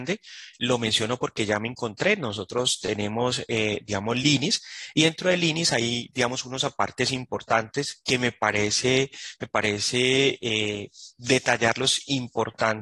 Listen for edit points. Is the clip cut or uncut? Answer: uncut